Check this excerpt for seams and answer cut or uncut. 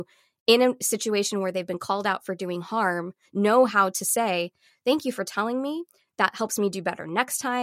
uncut